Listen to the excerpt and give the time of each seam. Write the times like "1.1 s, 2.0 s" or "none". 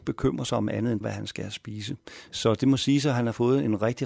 1.0 s